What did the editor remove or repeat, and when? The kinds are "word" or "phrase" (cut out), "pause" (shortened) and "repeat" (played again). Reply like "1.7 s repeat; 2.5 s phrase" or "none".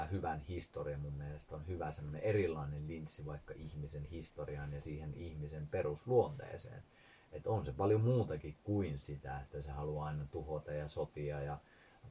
none